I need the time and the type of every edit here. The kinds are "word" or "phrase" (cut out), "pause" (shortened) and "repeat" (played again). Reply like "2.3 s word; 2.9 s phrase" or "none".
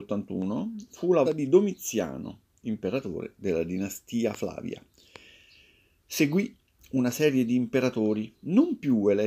1.2 s word; 2.6 s word